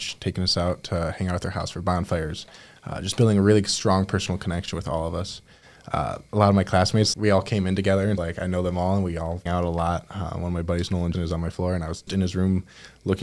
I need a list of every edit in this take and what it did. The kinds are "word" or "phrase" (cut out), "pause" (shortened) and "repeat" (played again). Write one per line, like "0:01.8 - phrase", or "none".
0:07.1 - word
0:08.2 - word
0:09.5 - word
0:11.1 - word
0:12.1 - word